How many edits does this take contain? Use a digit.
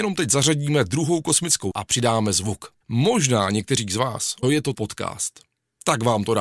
4